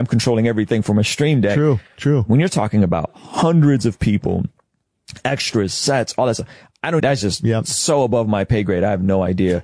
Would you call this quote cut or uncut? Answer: cut